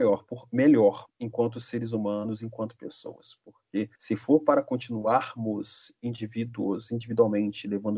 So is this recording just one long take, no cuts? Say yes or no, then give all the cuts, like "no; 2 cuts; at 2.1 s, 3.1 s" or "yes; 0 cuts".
no; 2 cuts; at 1.1 s, 3.9 s